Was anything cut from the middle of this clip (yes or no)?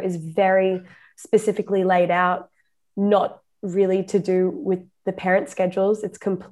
no